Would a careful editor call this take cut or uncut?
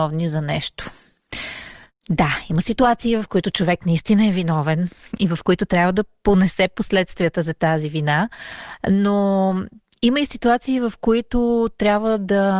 uncut